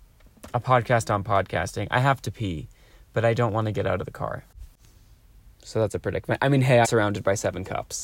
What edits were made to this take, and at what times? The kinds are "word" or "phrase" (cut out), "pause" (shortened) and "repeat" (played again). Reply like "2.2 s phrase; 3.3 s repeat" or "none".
6.8 s word